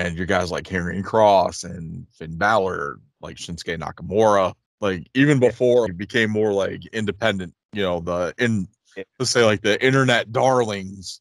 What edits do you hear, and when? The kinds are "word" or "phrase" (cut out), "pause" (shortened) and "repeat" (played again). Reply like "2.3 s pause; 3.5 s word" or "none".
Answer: 4.6 s pause; 5.9 s word; 7.6 s pause